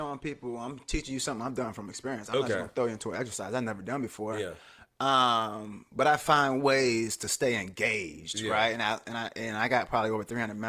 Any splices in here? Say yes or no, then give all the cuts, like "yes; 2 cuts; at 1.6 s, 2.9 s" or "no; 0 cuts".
no; 0 cuts